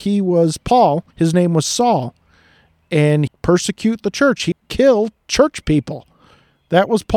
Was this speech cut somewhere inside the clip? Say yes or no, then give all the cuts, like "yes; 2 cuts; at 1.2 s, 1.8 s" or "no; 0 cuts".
yes; 3 cuts; at 1.1 s, 3.3 s, 4.5 s